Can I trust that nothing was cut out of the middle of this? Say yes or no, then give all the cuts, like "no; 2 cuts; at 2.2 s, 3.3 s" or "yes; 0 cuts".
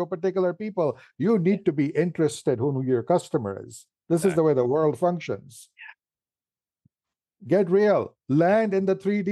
yes; 0 cuts